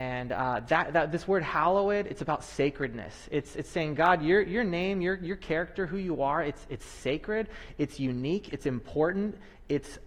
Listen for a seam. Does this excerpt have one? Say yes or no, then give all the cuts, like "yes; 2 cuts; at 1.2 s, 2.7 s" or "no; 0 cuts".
no; 0 cuts